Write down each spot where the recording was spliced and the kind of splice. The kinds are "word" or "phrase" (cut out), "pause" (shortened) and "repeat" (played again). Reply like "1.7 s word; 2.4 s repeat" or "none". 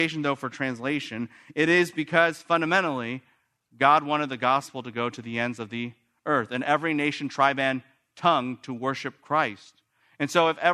none